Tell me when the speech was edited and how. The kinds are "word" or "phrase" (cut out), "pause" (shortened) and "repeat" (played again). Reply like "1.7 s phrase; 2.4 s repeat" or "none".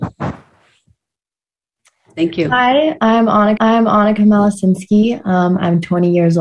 3.6 s repeat